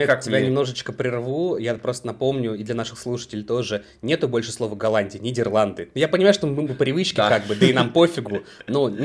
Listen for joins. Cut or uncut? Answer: uncut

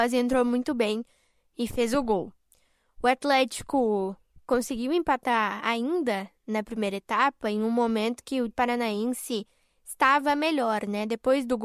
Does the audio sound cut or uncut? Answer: cut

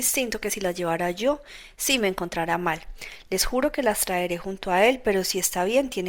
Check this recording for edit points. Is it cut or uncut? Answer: uncut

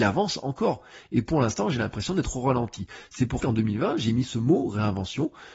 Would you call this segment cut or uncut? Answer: cut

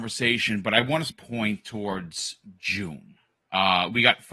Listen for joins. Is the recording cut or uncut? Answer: cut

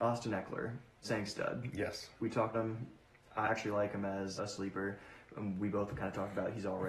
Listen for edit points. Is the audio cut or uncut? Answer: cut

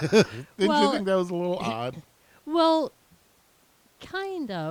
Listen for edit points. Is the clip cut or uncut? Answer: uncut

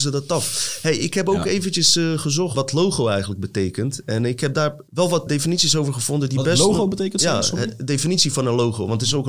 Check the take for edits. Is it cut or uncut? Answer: cut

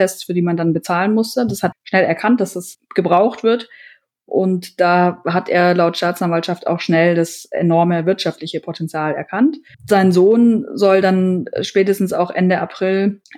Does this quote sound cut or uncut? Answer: cut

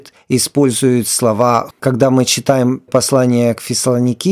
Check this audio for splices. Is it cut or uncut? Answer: cut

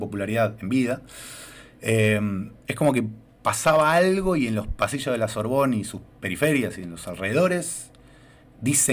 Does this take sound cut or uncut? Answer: cut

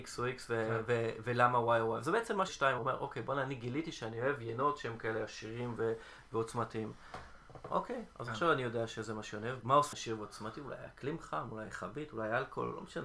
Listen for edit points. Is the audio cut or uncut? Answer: cut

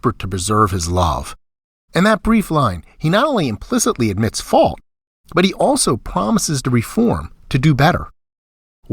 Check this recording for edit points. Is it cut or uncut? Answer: uncut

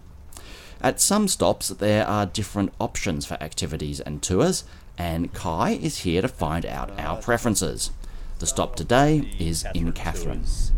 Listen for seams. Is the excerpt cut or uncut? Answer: uncut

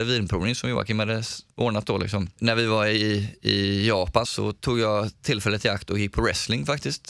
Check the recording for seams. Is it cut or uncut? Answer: cut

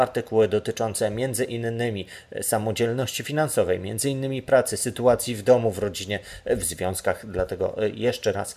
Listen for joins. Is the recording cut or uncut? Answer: uncut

